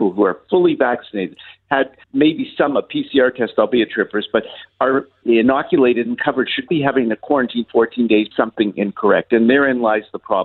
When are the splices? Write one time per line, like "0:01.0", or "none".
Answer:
0:02.0
0:03.9
0:05.2
0:06.7
0:08.3